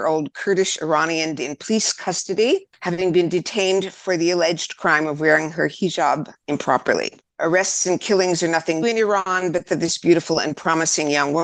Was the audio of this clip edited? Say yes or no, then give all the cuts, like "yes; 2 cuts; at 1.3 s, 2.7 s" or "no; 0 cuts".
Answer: yes; 3 cuts; at 1.4 s, 8.8 s, 9.7 s